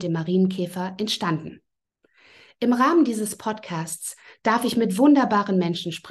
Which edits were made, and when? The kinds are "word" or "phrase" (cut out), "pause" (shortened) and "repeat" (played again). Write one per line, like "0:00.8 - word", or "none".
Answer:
none